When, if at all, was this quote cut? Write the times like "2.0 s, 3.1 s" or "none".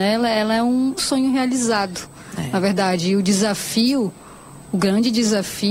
1.0 s

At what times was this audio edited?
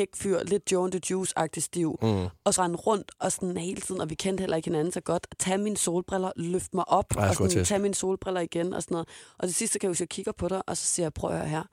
2.6 s

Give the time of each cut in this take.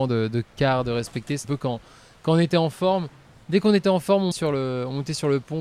1.4 s, 4.3 s

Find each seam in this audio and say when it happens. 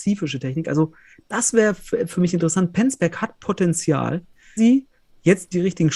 4.6 s

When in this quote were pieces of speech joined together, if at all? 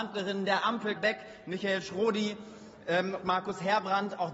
1.0 s, 3.2 s

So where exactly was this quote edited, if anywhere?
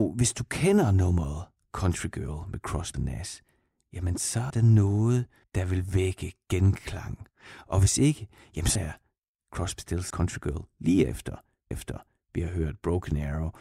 2.9 s, 4.5 s, 5.4 s, 8.8 s, 10.1 s, 11.7 s

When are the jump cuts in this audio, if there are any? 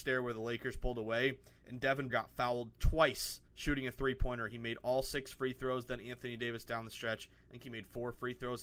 2.1 s, 3.5 s

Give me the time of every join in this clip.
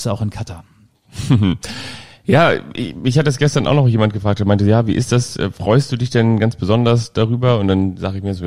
none

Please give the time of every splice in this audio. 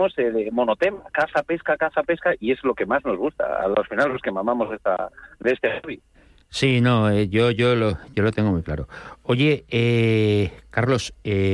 5.3 s, 6.1 s

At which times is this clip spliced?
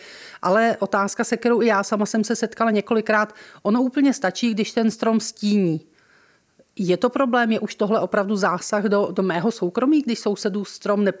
none

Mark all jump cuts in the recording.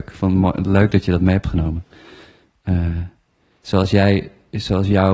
none

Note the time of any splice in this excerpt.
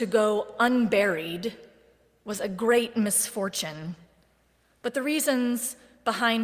none

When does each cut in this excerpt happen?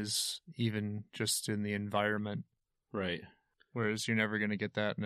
none

